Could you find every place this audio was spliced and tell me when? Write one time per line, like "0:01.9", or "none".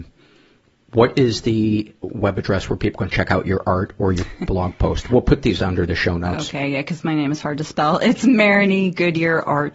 0:05.6